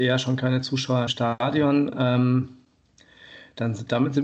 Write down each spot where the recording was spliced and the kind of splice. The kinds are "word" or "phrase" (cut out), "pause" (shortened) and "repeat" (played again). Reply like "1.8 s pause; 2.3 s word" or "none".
1.1 s word